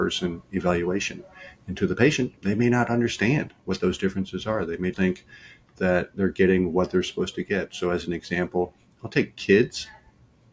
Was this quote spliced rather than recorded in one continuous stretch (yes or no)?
yes